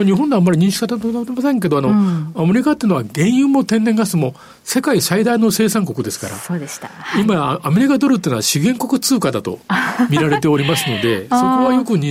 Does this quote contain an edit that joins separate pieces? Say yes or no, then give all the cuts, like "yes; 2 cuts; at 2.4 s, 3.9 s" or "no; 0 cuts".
no; 0 cuts